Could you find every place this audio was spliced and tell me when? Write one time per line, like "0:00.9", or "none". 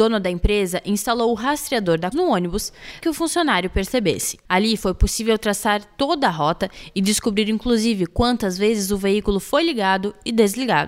0:02.1
0:03.0

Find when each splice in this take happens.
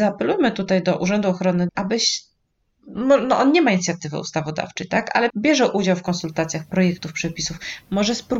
0:01.7
0:05.3

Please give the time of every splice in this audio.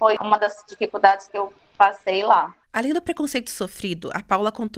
none

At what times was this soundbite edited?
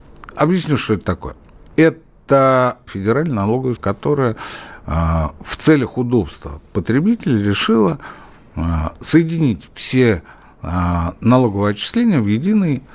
0:02.9
0:03.8

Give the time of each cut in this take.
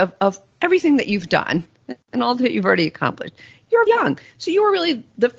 0:03.9

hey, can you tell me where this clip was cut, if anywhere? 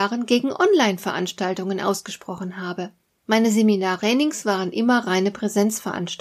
0:04.0

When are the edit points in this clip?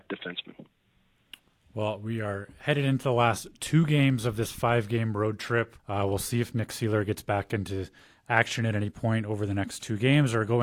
0:05.8

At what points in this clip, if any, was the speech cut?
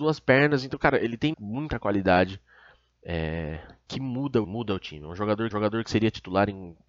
0:01.3
0:03.9
0:04.4
0:05.5

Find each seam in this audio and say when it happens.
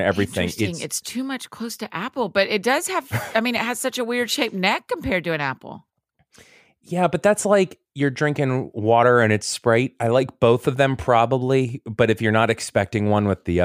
none

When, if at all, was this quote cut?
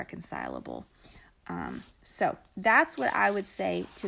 none

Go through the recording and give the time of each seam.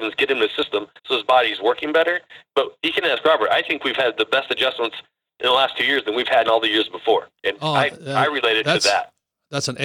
0:01.0
0:06.4
0:07.4

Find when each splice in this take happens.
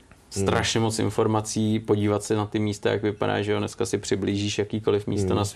none

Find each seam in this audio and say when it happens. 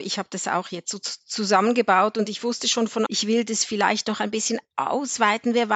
0:03.1

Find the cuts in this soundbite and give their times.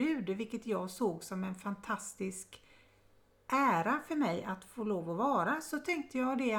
none

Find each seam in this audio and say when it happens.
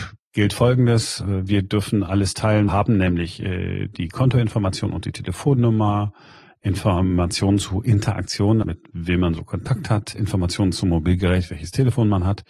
0:02.7
0:08.6

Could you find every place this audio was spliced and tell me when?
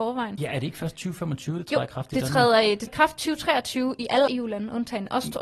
0:02.9
0:04.3

